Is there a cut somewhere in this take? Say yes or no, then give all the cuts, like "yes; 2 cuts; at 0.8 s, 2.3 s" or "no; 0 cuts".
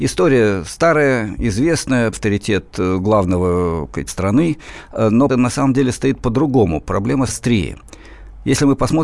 yes; 4 cuts; at 2.1 s, 4.1 s, 5.3 s, 7.3 s